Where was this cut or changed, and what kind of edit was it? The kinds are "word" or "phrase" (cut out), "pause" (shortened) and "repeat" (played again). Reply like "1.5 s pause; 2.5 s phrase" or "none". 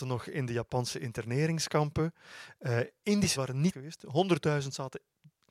3.4 s phrase; 3.7 s word